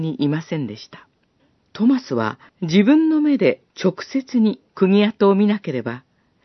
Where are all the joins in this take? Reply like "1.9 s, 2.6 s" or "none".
1.4 s, 2.5 s, 3.7 s, 4.7 s